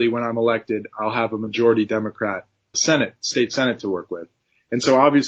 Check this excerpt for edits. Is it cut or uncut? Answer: cut